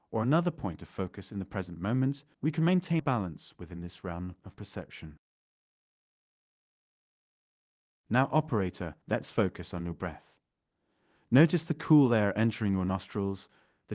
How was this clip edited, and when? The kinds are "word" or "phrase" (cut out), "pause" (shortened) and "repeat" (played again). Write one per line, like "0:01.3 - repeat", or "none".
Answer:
0:02.3 - pause
0:03.0 - word
0:09.0 - pause